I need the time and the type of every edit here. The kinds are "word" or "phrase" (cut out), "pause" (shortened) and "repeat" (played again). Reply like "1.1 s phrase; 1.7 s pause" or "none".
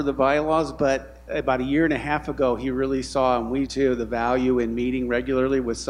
1.3 s word; 3.7 s word